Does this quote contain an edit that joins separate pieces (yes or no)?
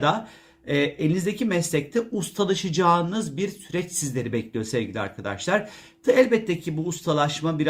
no